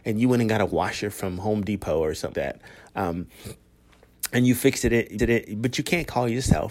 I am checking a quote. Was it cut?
yes; 2 cuts; at 2.3 s, 5.2 s

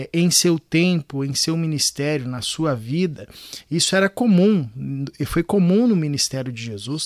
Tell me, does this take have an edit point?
no; 0 cuts

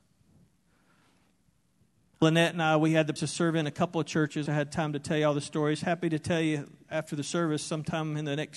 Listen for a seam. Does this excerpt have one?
yes; 3 cuts; at 2.2 s, 3.2 s, 4.5 s

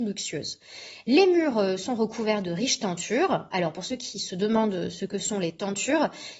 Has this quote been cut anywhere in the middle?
no; 0 cuts

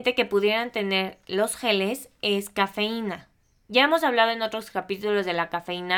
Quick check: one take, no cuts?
yes; 0 cuts

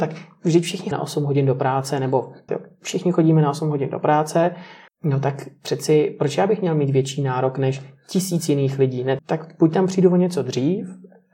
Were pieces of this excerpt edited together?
yes; 4 cuts; at 0.9 s, 2.5 s, 4.9 s, 9.2 s

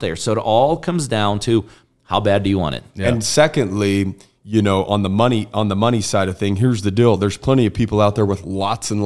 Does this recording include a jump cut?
no; 0 cuts

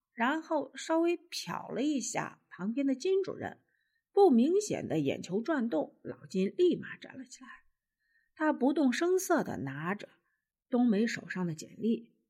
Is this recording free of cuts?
yes; 0 cuts

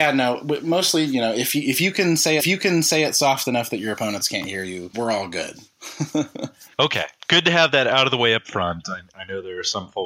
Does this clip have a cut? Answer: yes; 3 cuts; at 2.4 s, 4.9 s, 6.7 s

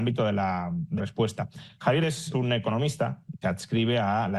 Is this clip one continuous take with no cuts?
no; 4 cuts; at 1.0 s, 2.0 s, 2.3 s, 3.4 s

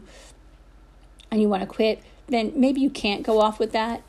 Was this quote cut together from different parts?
no; 0 cuts

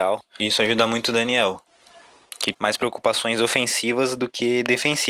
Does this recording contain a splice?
yes; 1 cut; at 2.5 s

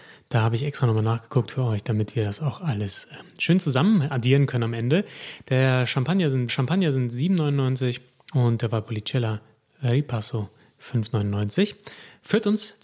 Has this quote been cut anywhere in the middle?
yes; 1 cut; at 6.5 s

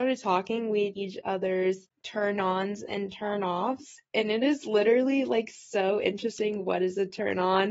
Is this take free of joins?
no; 1 cut; at 0.9 s

